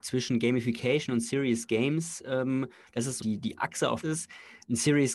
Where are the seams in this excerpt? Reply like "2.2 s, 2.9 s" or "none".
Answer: 3.2 s, 4.0 s